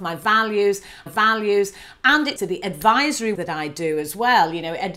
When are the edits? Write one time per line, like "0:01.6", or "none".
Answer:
0:01.1
0:02.4
0:03.3